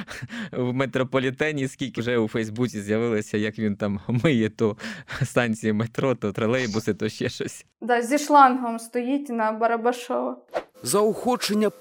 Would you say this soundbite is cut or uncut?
cut